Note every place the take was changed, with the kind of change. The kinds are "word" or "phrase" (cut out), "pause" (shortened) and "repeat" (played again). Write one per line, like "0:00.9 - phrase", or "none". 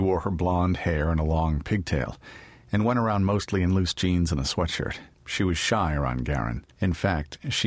0:05.1 - pause
0:06.7 - pause